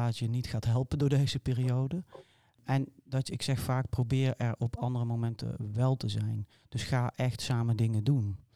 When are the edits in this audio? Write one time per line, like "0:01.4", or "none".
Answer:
none